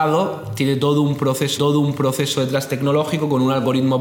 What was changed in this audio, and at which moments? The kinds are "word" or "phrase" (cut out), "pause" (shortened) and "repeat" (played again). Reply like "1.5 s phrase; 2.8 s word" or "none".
1.6 s repeat